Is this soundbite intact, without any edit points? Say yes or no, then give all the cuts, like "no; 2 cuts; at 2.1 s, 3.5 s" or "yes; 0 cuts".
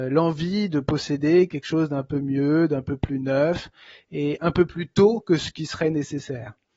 yes; 0 cuts